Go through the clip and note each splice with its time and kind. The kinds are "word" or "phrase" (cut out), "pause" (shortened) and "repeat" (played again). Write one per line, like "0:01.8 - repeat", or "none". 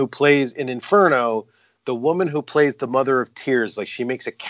none